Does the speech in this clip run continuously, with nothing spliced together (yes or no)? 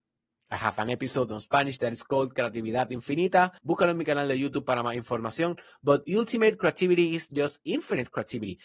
no